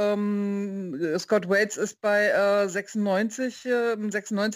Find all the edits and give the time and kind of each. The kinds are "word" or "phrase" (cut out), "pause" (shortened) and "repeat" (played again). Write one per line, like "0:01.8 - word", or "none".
none